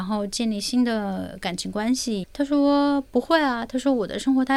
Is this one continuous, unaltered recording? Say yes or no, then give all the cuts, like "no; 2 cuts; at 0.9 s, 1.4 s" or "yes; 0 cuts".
no; 1 cut; at 2.2 s